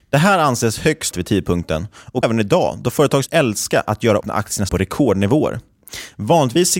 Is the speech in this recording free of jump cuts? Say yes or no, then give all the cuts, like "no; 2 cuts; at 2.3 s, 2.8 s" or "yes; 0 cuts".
no; 5 cuts; at 1.1 s, 2.2 s, 3.3 s, 4.2 s, 4.7 s